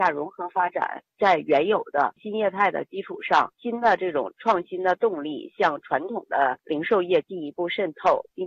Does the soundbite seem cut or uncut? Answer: uncut